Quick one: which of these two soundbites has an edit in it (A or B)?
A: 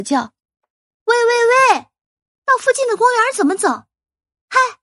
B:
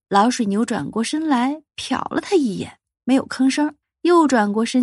B